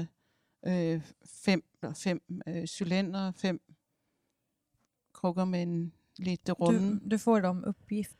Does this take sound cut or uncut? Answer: cut